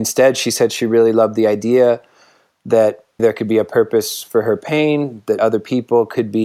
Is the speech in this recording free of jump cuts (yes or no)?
no